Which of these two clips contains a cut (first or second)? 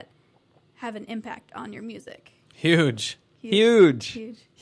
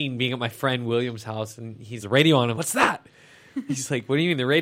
second